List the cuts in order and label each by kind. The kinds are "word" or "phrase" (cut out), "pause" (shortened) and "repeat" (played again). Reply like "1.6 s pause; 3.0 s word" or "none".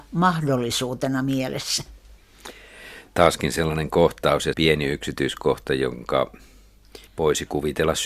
4.5 s word; 7.1 s pause